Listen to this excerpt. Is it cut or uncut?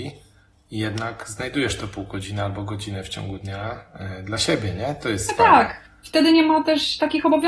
uncut